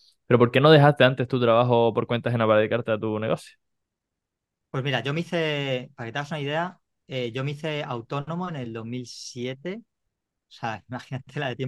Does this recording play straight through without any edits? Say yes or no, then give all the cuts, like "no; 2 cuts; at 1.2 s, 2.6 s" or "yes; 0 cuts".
yes; 0 cuts